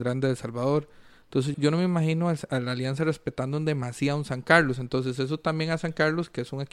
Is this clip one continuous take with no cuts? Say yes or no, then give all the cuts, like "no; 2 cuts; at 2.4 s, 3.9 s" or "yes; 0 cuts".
no; 1 cut; at 1.5 s